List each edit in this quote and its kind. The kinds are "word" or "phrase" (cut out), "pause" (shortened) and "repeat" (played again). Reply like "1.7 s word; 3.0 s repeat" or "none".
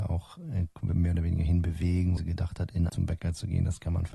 2.2 s word; 2.9 s phrase